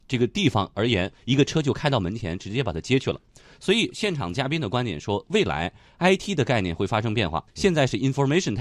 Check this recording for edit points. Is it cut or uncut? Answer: cut